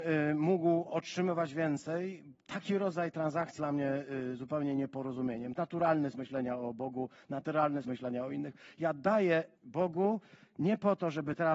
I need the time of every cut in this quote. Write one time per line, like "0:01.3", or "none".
0:03.6
0:05.6
0:06.1
0:07.8
0:09.6